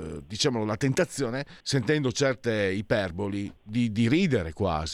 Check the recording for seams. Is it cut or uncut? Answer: cut